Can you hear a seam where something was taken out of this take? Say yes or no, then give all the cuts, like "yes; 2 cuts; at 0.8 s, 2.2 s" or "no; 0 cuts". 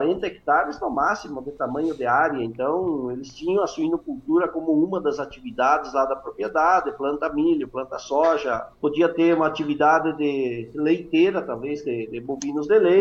yes; 1 cut; at 8.7 s